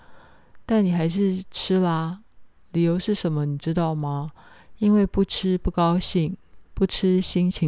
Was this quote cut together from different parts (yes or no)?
yes